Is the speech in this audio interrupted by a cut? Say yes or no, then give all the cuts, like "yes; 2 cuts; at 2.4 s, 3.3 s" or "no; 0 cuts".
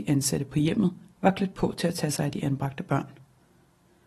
no; 0 cuts